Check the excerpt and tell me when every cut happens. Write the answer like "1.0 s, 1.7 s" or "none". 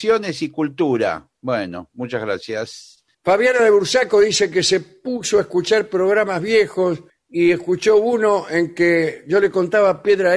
1.4 s, 3.1 s, 7.1 s